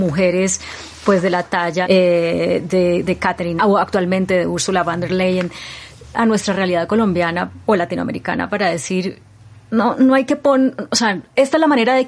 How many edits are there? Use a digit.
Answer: 3